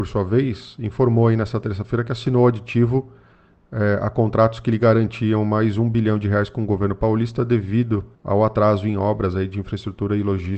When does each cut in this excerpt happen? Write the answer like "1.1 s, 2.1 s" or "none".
8.1 s